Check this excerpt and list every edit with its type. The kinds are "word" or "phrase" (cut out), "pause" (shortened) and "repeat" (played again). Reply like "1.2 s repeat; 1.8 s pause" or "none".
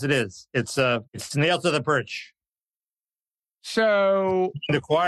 1.1 s pause